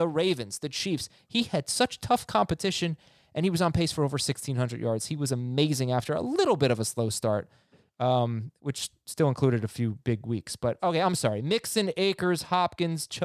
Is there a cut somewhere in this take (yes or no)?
no